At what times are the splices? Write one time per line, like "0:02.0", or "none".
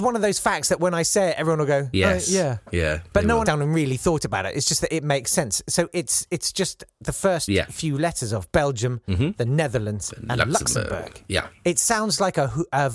0:03.4